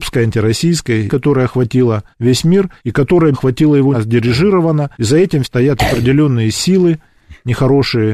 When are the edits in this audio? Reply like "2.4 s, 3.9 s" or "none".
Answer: 1.1 s, 2.1 s, 2.8 s, 3.3 s, 3.9 s, 4.9 s, 5.4 s